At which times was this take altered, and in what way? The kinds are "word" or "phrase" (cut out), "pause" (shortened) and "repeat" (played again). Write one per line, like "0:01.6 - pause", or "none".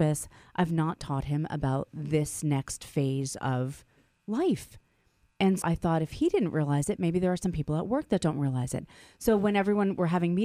0:05.6 - word